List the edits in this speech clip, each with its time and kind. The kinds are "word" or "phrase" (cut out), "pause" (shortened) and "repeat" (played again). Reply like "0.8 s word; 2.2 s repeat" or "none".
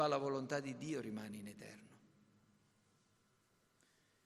none